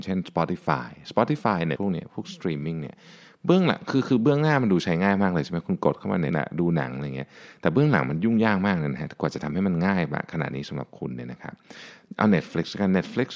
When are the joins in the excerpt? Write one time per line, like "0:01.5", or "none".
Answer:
0:01.7
0:06.3